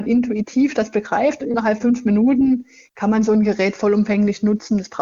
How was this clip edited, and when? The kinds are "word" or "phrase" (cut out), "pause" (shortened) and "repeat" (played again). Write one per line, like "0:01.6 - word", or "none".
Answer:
0:01.8 - word